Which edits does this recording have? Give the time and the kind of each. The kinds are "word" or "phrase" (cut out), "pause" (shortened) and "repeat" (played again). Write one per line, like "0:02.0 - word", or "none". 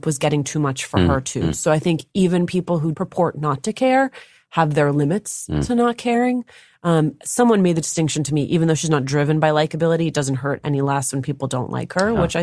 none

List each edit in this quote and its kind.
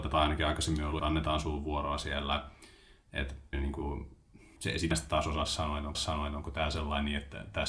0:01.0 - phrase
0:03.5 - word
0:04.6 - word
0:04.9 - word
0:05.9 - repeat

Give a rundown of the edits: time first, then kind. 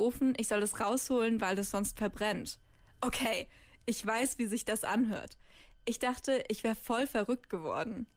none

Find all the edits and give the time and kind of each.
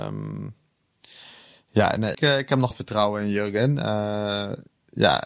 0:02.1 - word
0:02.7 - word

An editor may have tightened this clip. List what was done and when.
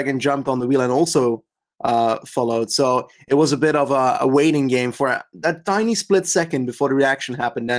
none

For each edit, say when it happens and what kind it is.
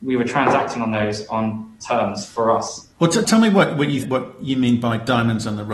0:01.8 - phrase
0:02.9 - pause
0:03.2 - word
0:04.0 - word

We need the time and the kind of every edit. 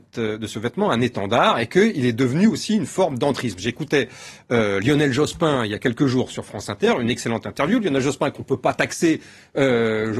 none

